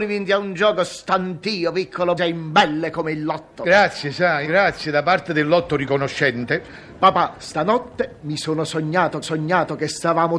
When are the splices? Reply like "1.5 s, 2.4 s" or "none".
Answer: 2.2 s, 4.4 s, 9.2 s